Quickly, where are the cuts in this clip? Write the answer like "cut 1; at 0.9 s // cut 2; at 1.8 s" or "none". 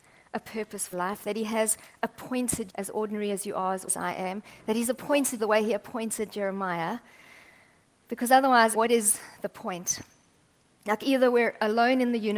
cut 1; at 0.9 s // cut 2; at 2.7 s // cut 3; at 3.9 s // cut 4; at 5.4 s // cut 5; at 8.7 s